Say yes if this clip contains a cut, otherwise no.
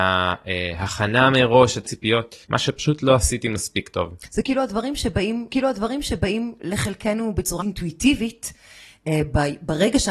yes